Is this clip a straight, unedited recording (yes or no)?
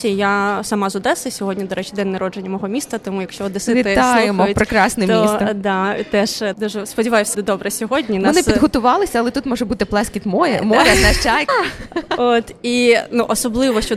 no